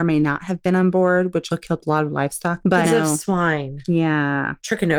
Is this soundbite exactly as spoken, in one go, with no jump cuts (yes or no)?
no